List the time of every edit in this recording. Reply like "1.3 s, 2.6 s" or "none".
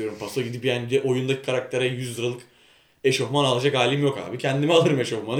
none